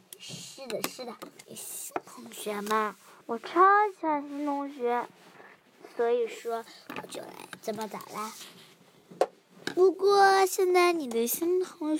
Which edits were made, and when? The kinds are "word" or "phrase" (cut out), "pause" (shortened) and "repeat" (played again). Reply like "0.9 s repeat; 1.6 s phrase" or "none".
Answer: 1.4 s pause; 3.2 s pause